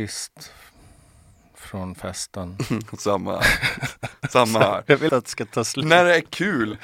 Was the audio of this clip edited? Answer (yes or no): yes